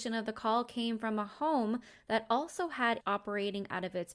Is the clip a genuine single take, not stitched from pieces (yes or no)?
no